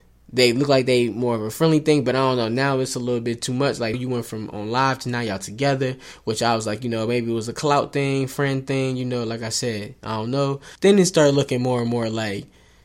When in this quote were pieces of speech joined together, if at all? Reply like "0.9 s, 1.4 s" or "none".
3.9 s, 10.8 s